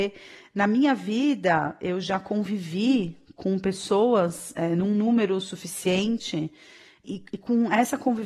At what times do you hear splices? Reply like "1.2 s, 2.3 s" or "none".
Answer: none